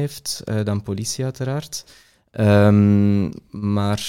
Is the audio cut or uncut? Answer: uncut